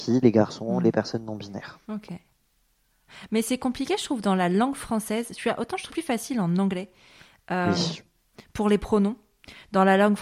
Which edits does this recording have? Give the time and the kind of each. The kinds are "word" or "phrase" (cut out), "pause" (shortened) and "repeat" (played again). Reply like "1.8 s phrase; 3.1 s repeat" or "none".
1.8 s pause; 5.9 s phrase; 7.6 s word